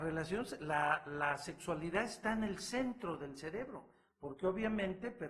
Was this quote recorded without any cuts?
yes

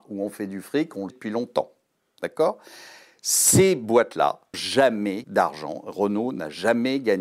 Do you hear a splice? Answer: yes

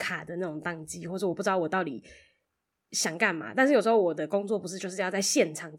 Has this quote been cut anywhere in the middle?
no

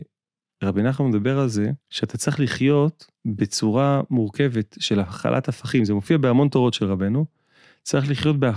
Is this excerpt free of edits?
no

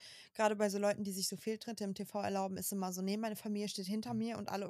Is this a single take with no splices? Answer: yes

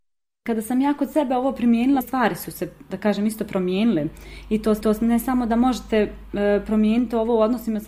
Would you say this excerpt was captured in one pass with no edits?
no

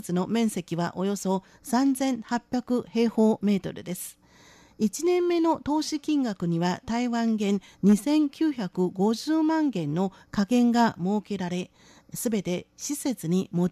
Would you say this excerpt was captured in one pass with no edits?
yes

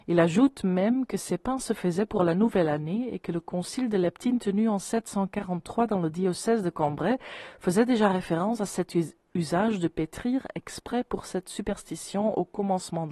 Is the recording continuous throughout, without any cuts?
yes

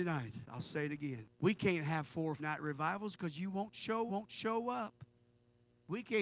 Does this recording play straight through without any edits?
no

